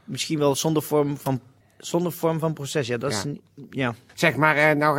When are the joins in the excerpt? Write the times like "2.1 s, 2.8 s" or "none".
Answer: none

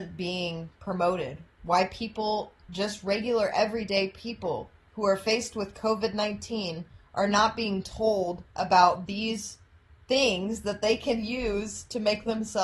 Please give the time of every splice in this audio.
4.8 s, 8.5 s, 9.9 s

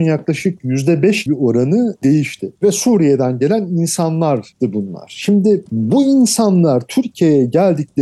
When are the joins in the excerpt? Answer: 1.3 s

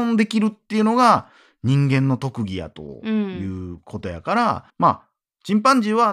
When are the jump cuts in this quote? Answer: 4.7 s

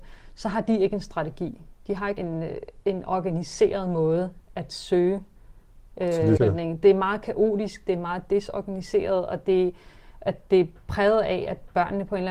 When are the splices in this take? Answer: 2.2 s, 6.4 s

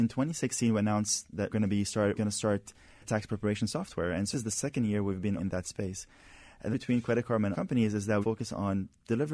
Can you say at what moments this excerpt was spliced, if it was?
1.5 s, 2.2 s, 3.0 s, 4.3 s, 5.4 s, 6.7 s, 7.5 s, 8.2 s

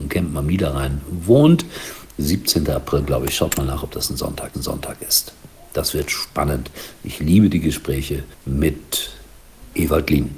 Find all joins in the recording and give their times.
4.5 s, 8.3 s

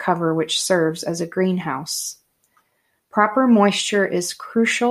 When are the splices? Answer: none

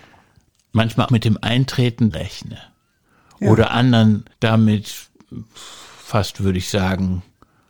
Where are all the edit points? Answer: 1.1 s, 2.1 s, 4.3 s

